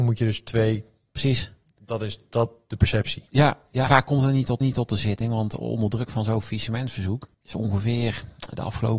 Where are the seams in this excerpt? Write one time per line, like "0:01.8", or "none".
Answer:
0:03.9
0:04.6
0:07.3